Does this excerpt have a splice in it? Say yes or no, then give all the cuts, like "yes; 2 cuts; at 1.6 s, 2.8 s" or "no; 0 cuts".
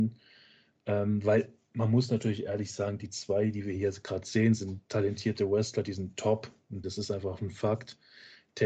yes; 1 cut; at 6.8 s